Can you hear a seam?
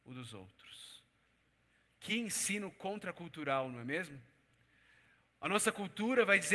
no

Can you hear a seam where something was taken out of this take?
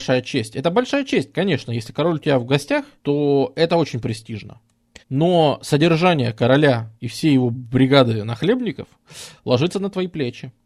yes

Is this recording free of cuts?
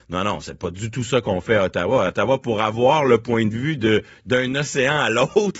yes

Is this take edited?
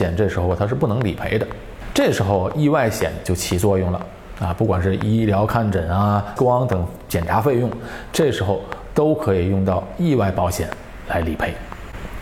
yes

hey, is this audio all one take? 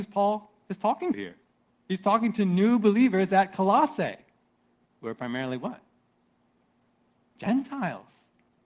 no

